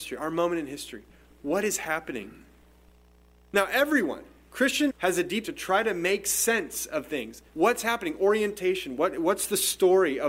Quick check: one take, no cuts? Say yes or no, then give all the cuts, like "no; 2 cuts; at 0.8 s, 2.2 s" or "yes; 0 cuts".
no; 3 cuts; at 4.9 s, 5.4 s, 7.5 s